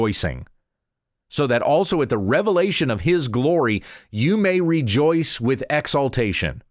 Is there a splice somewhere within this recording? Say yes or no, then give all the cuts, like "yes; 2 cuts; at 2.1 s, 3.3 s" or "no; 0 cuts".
no; 0 cuts